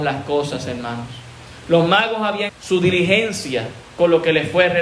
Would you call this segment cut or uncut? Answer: cut